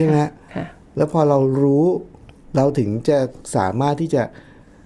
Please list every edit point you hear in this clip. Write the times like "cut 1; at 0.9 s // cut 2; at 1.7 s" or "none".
none